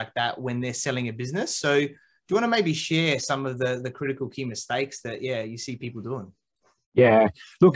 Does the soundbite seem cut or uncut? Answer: uncut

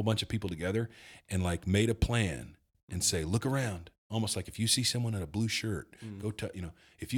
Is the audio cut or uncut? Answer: uncut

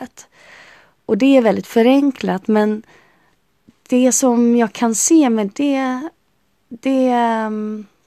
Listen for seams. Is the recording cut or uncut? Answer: uncut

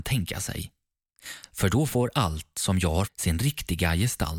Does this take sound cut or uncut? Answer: cut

